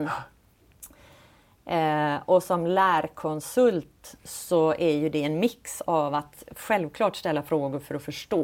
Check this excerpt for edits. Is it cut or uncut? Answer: uncut